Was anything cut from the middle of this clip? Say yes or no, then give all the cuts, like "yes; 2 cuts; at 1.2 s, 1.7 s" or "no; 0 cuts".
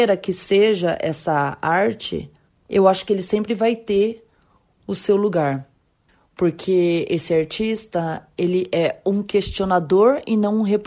no; 0 cuts